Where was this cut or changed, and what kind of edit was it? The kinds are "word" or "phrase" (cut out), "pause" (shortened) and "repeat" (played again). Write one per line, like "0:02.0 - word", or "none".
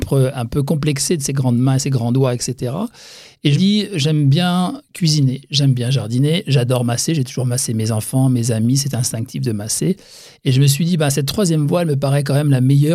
0:03.6 - phrase

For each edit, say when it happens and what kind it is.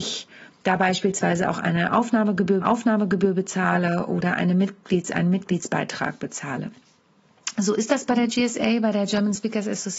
0:02.6 - repeat

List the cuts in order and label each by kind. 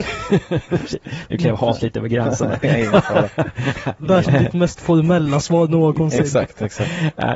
0:04.2 - word

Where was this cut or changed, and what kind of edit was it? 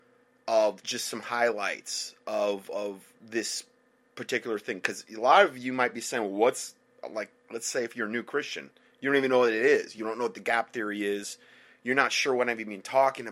none

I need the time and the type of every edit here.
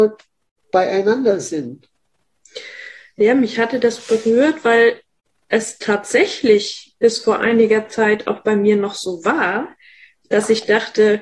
none

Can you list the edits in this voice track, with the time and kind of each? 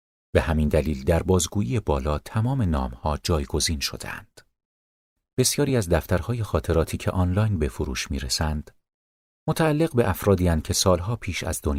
none

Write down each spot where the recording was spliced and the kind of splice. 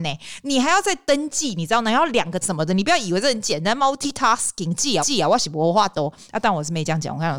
0:02.4 - word
0:05.0 - repeat

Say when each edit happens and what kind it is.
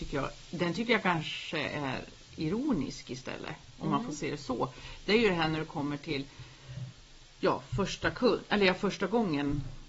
0:02.2 - pause

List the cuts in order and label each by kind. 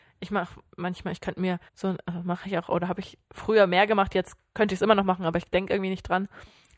0:01.7 - pause
0:03.2 - pause

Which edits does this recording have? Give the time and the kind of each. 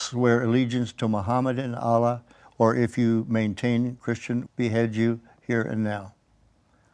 0:04.5 - phrase

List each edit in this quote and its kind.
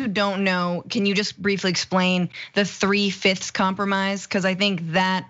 none

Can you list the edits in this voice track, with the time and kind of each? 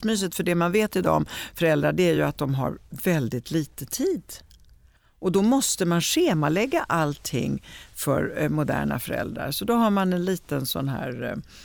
none

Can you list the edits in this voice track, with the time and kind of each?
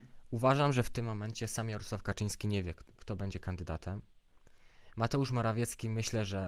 none

